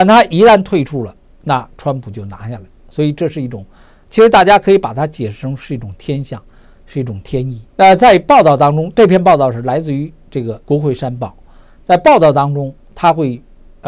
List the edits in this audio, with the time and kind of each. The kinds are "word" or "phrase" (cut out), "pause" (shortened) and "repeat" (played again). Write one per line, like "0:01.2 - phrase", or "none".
0:07.7 - pause
0:10.6 - pause